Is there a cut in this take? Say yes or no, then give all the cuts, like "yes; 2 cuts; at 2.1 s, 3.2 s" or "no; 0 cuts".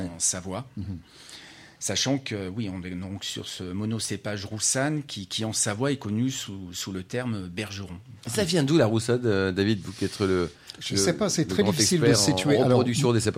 no; 0 cuts